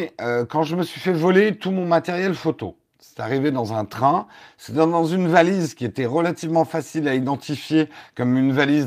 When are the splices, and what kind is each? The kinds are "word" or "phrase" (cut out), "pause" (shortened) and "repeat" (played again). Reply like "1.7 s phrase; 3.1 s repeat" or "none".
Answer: none